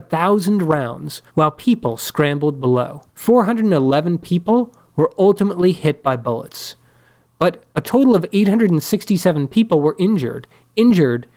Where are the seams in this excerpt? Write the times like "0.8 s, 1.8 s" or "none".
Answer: 1.3 s, 3.1 s, 7.7 s